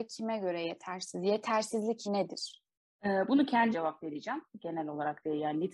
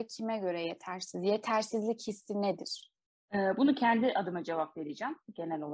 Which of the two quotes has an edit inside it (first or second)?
first